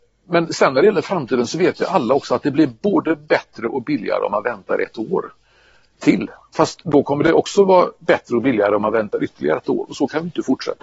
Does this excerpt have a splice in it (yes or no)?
no